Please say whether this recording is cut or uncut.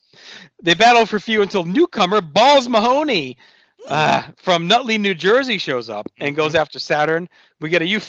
uncut